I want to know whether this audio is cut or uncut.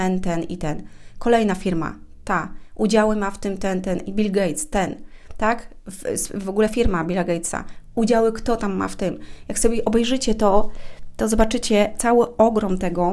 uncut